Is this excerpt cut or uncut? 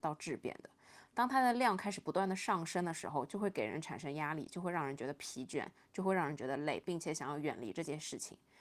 uncut